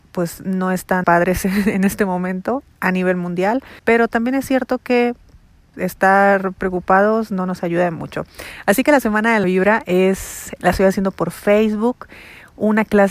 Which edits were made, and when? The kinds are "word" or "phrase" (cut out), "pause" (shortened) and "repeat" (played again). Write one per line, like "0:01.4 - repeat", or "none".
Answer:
0:01.0 - word
0:03.8 - pause
0:05.7 - word
0:09.4 - word
0:10.6 - word